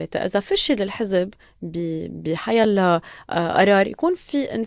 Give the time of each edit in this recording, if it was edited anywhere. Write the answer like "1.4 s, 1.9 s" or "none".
none